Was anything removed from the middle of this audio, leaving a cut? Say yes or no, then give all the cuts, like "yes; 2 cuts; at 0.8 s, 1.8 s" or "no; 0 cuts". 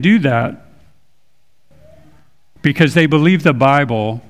no; 0 cuts